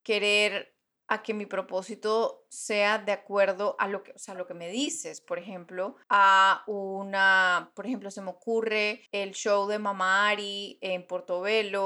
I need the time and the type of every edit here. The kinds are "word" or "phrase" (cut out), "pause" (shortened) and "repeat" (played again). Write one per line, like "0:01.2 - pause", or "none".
0:06.0 - pause
0:09.1 - pause